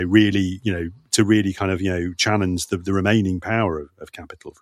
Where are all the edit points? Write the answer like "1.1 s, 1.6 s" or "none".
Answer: none